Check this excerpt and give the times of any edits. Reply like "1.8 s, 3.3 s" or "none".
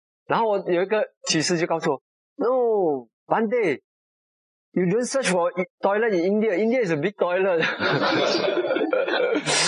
none